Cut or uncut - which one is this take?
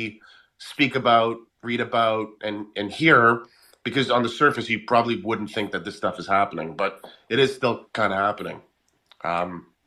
cut